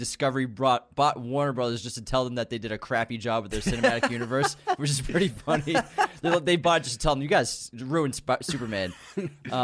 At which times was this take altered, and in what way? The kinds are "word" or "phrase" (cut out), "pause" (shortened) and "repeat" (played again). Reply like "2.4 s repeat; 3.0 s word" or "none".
none